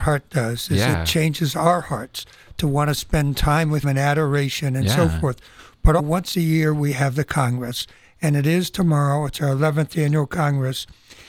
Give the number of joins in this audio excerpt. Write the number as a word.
two